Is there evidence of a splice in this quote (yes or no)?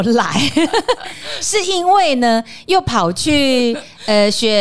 no